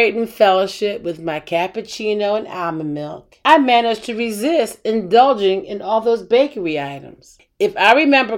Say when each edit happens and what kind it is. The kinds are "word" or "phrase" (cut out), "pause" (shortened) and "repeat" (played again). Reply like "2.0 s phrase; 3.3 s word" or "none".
3.4 s pause